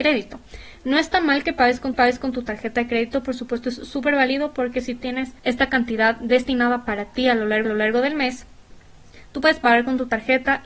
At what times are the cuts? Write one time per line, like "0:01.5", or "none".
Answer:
0:01.9
0:05.0
0:05.4
0:07.6